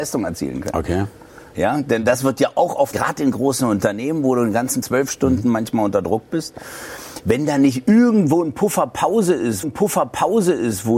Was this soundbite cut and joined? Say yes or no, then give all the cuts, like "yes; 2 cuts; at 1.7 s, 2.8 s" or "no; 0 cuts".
yes; 3 cuts; at 2.9 s, 4.8 s, 9.6 s